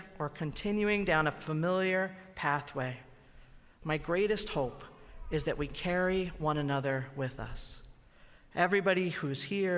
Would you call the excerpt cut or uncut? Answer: uncut